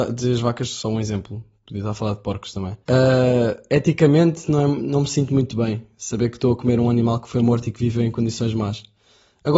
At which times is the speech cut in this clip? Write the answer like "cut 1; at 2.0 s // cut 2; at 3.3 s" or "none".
cut 1; at 2.8 s